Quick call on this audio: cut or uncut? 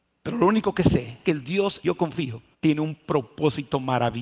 cut